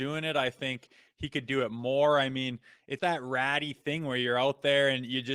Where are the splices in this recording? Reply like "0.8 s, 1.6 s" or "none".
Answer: 3.0 s